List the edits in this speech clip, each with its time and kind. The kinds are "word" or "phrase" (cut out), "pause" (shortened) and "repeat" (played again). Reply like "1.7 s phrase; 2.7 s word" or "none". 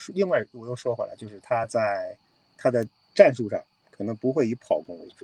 none

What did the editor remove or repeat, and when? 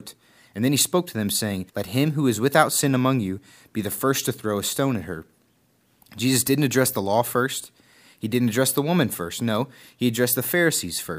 1.7 s pause

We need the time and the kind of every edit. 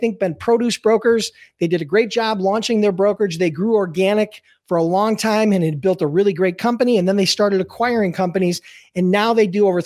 none

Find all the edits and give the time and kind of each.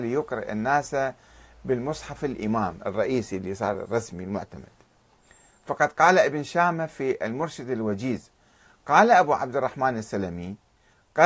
none

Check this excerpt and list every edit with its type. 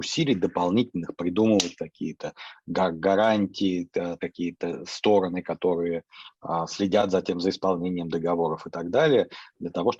4.2 s word

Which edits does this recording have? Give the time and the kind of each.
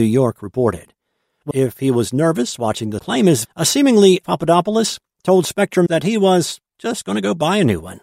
1.5 s word; 3.0 s word; 3.4 s word; 4.2 s word; 5.9 s word

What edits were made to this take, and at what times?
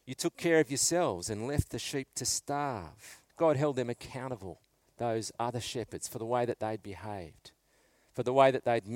3.3 s pause

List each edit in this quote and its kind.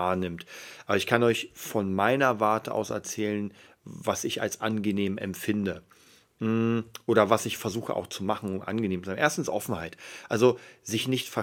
none

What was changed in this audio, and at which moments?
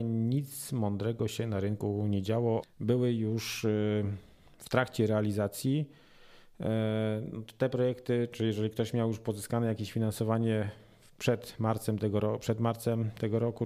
2.6 s phrase

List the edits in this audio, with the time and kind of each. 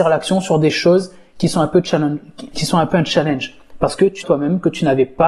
2.5 s word; 4.2 s phrase

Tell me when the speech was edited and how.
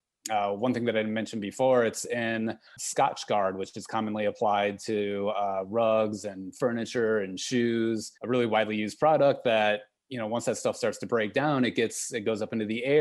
2.7 s pause; 8.2 s pause

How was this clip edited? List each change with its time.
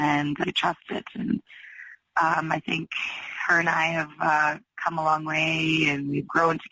none

